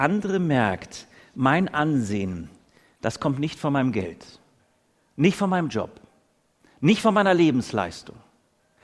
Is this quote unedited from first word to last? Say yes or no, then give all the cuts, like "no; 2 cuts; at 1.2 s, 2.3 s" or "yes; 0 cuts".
yes; 0 cuts